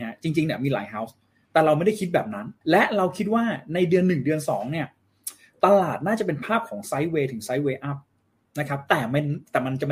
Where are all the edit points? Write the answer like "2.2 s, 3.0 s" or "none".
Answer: 2.6 s